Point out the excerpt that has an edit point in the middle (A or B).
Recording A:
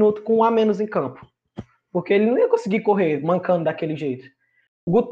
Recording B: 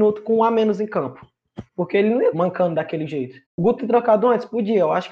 B